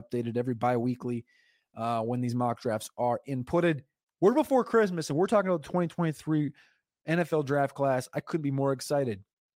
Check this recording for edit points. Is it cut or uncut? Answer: uncut